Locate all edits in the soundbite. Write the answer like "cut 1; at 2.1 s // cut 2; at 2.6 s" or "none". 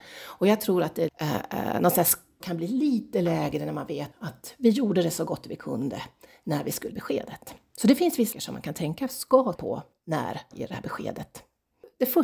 cut 1; at 1.1 s // cut 2; at 2.4 s // cut 3; at 4.1 s // cut 4; at 6.9 s // cut 5; at 8.3 s // cut 6; at 9.5 s // cut 7; at 10.5 s